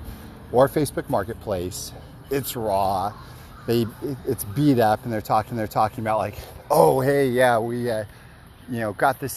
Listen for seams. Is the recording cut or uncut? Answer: cut